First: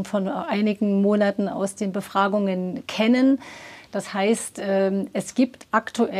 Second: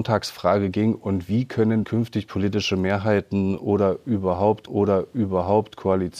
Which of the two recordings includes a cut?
second; 2 cuts; at 1.8 s, 4.7 s

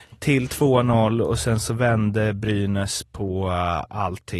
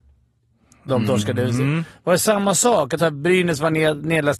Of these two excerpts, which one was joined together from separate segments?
second; 1 cut; at 3.0 s

